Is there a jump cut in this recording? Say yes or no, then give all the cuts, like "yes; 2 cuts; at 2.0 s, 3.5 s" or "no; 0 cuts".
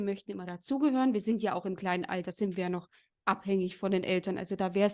no; 0 cuts